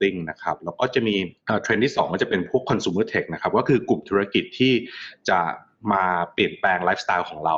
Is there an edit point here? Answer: no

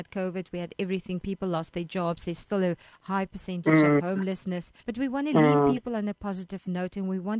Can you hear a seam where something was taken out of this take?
yes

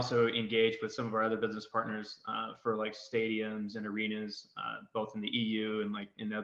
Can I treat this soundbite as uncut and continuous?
yes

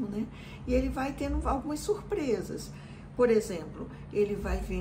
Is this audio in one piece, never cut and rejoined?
yes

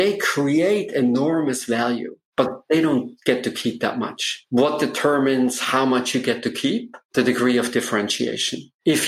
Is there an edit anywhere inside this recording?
no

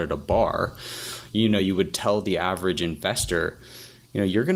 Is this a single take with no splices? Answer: yes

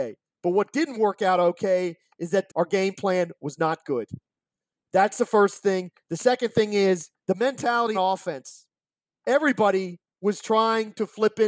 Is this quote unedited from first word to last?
no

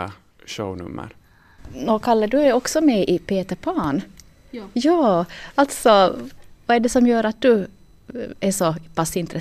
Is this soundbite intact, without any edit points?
yes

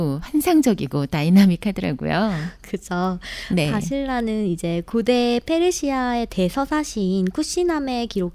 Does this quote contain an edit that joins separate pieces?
no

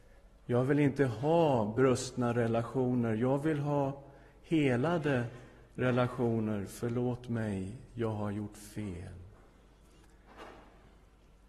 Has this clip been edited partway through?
no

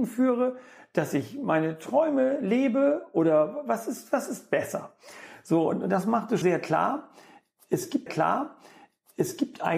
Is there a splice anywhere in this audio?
yes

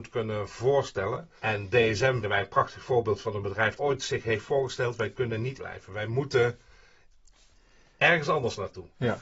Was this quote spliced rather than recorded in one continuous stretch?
yes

